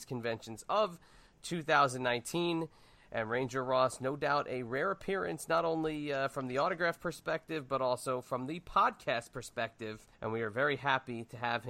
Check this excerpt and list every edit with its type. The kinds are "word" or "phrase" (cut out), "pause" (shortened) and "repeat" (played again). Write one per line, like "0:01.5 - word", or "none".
0:10.1 - pause